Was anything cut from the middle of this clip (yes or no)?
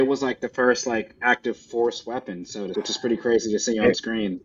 yes